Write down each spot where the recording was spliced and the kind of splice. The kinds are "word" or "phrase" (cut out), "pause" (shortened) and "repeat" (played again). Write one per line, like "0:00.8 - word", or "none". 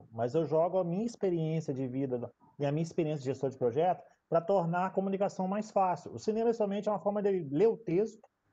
none